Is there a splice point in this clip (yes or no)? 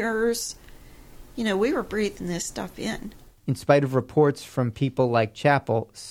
no